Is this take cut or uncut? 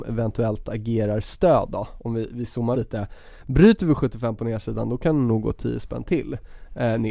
cut